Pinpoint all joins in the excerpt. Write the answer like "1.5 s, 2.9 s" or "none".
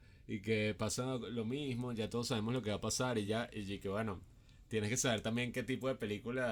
none